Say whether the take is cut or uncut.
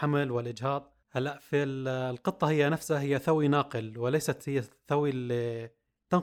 cut